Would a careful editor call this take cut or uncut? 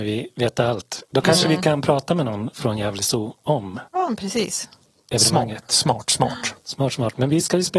cut